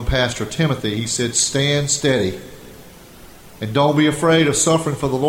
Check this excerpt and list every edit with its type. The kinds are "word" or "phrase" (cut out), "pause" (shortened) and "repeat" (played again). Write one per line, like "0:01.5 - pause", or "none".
none